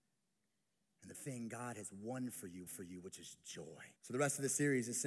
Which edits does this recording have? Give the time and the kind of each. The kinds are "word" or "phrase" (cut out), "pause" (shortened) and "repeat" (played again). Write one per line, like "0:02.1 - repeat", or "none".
0:01.1 - word
0:02.7 - repeat
0:04.0 - pause